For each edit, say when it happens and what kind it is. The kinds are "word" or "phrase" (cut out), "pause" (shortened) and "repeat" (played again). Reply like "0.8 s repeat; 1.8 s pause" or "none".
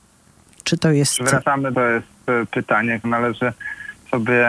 1.7 s phrase; 3.0 s word